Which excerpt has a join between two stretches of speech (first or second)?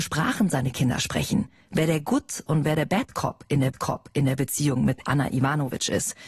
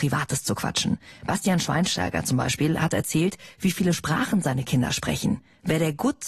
first